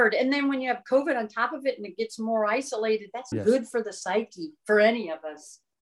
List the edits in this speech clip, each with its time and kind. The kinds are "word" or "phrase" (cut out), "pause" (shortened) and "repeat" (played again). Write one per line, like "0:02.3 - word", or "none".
0:03.3 - word